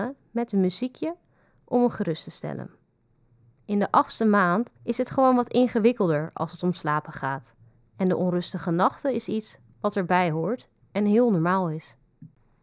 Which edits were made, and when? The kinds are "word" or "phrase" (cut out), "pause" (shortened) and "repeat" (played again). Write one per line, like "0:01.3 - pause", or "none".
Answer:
0:04.8 - pause